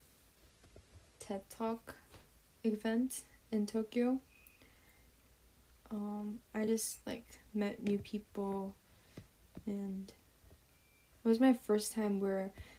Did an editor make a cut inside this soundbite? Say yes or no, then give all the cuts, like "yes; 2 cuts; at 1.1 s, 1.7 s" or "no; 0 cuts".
no; 0 cuts